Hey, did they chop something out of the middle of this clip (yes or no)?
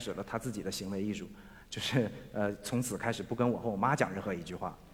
no